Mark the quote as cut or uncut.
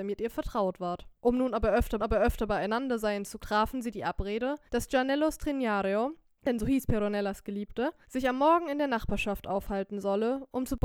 cut